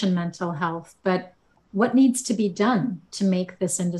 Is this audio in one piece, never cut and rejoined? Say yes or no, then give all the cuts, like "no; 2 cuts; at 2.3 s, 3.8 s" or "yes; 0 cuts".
yes; 0 cuts